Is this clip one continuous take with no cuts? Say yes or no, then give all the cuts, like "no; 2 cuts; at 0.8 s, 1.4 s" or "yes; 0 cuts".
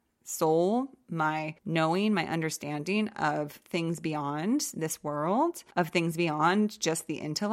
no; 2 cuts; at 1.6 s, 5.7 s